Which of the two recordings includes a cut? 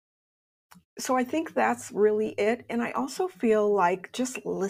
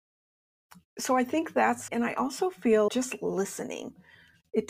second; 2 cuts; at 1.9 s, 2.9 s

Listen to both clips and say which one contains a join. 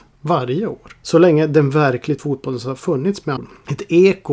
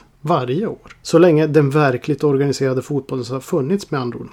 first; 2 cuts; at 2.2 s, 3.4 s

